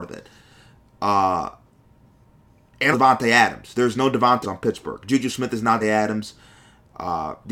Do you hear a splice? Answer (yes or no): yes